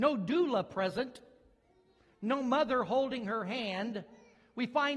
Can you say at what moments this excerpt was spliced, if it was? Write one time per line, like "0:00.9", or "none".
none